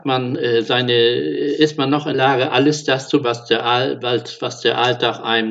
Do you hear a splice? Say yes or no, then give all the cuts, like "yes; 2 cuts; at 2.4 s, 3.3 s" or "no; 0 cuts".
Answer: yes; 2 cuts; at 2.1 s, 3.2 s